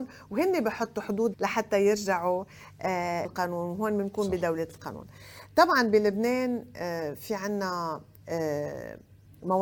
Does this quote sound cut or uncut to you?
cut